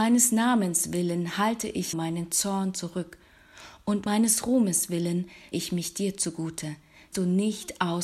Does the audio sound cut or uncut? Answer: cut